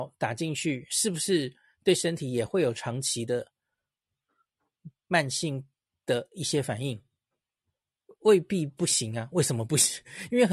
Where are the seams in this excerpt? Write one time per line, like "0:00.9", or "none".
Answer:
none